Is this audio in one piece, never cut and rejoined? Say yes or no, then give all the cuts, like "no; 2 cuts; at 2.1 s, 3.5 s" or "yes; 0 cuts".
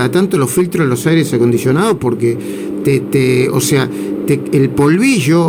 yes; 0 cuts